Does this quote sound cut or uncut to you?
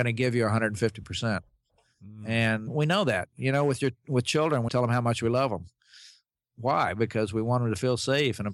cut